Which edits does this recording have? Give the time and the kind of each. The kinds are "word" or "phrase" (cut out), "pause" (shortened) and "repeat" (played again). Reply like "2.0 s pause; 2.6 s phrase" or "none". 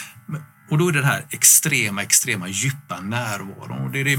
none

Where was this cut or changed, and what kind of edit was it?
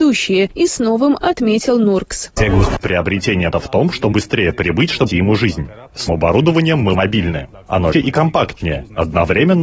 1.2 s word; 2.4 s word; 3.5 s word; 4.1 s word; 5.1 s word; 6.1 s word; 6.9 s word; 7.9 s word

